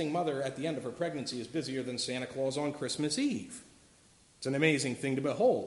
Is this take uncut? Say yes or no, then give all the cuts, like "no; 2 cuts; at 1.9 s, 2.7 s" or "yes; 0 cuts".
yes; 0 cuts